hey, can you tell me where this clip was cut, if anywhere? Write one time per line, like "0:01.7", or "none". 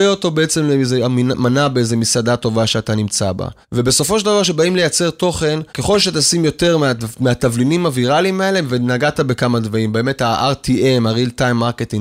0:03.6
0:05.7